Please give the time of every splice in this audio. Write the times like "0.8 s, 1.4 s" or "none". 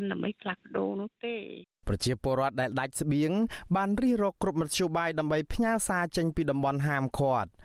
1.8 s